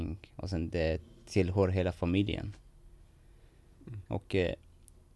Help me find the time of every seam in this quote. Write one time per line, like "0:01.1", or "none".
0:04.1